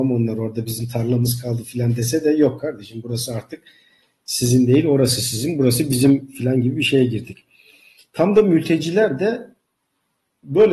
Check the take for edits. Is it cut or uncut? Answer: uncut